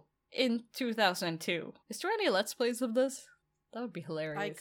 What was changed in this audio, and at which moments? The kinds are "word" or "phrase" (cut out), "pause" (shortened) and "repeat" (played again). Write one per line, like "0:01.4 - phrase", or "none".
0:01.8 - pause